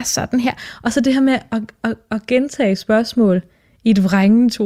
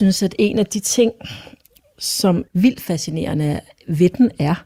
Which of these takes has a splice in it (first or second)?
second